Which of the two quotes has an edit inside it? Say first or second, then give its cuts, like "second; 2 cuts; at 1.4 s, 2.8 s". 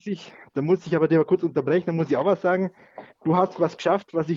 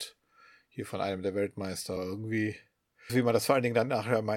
second; 2 cuts; at 2.0 s, 3.1 s